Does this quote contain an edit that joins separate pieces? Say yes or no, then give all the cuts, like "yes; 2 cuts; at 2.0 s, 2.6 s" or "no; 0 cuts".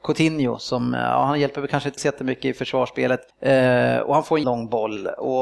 yes; 3 cuts; at 2.0 s, 3.3 s, 4.4 s